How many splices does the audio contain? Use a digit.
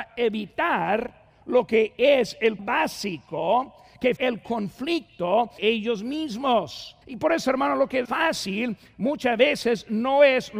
5